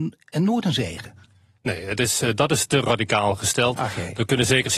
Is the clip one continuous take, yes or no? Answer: yes